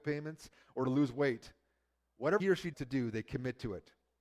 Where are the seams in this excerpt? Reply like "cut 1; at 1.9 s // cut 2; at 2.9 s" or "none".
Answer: cut 1; at 2.4 s // cut 2; at 2.7 s